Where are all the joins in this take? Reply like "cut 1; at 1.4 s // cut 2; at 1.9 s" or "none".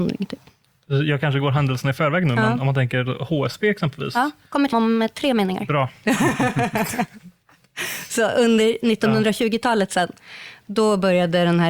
cut 1; at 4.7 s